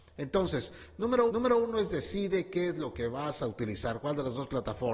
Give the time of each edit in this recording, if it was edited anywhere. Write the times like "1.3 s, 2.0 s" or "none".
1.3 s